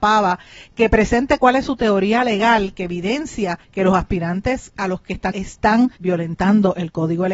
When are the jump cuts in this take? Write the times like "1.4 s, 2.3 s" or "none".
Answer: 3.6 s, 5.3 s, 6.0 s

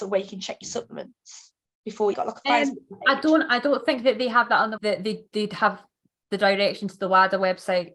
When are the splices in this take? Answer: 2.1 s, 4.8 s

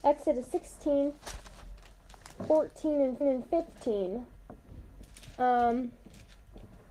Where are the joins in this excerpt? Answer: 3.2 s

